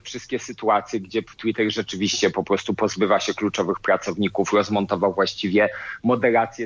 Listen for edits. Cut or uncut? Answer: uncut